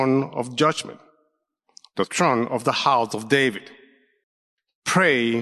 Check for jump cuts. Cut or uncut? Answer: uncut